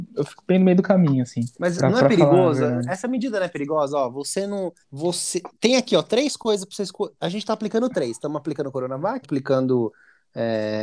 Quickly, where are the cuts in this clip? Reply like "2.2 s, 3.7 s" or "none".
1.5 s, 4.8 s, 7.2 s, 9.2 s